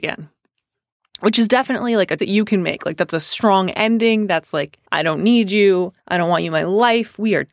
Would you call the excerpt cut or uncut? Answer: cut